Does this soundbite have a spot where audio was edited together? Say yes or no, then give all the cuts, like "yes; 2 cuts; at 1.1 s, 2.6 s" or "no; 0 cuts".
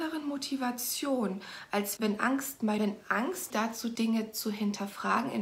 yes; 4 cuts; at 2.0 s, 2.8 s, 3.5 s, 4.0 s